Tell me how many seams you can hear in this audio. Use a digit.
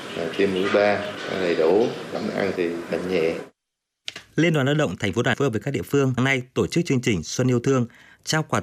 4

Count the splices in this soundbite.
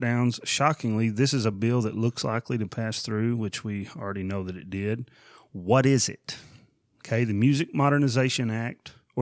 0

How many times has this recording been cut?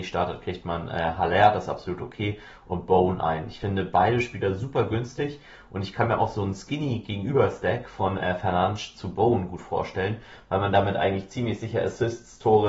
0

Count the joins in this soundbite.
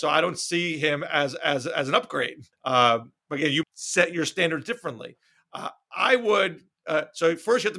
2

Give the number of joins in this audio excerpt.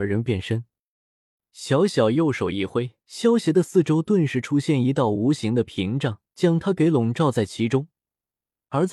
2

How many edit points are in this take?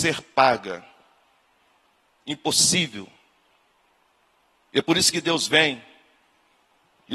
0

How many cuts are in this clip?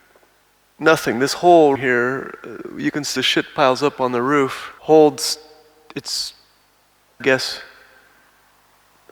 4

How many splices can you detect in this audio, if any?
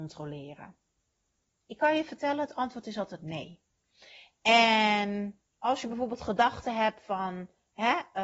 0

